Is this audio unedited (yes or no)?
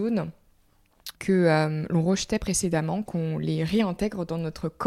no